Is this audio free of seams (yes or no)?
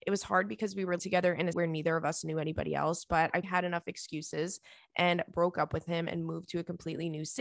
no